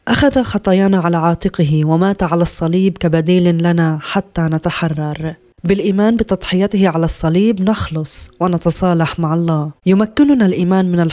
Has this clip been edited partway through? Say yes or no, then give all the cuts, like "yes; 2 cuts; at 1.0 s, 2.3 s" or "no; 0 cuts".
yes; 2 cuts; at 5.5 s, 9.8 s